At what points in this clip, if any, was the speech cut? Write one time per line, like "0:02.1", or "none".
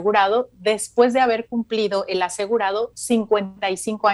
none